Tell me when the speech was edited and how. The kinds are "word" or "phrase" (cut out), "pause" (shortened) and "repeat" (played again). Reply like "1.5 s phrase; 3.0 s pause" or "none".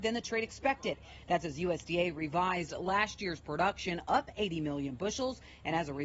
none